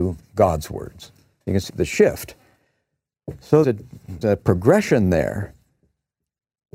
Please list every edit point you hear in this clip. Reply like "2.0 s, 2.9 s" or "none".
1.7 s, 3.6 s, 4.2 s